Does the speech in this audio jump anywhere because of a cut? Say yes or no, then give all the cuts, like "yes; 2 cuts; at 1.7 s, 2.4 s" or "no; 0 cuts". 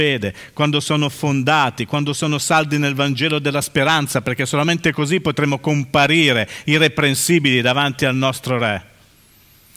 no; 0 cuts